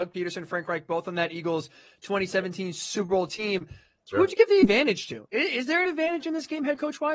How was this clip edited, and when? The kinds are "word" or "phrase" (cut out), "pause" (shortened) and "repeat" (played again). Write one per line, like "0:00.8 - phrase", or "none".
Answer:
none